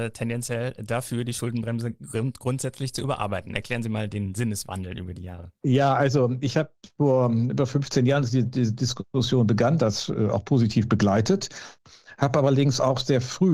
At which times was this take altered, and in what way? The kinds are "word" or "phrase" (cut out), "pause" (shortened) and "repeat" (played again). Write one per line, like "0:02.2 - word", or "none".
none